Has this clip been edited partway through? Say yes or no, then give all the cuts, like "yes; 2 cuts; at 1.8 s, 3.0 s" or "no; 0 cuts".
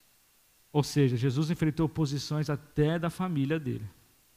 no; 0 cuts